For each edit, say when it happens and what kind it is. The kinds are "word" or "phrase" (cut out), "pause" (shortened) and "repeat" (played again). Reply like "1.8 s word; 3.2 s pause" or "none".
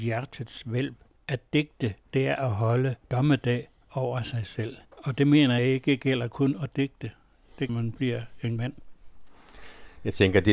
1.2 s pause; 2.0 s pause; 3.0 s pause; 4.8 s pause; 5.6 s word; 7.7 s phrase; 8.6 s word